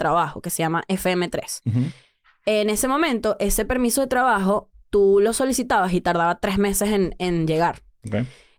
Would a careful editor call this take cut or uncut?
uncut